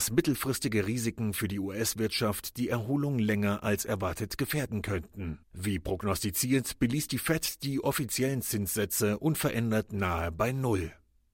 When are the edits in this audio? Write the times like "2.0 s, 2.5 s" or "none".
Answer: 5.4 s

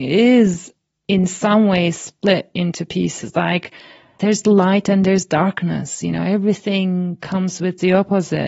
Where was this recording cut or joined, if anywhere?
none

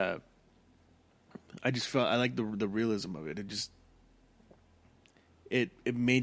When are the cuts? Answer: none

